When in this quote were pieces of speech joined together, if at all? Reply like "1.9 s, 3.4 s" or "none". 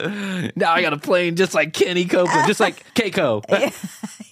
2.9 s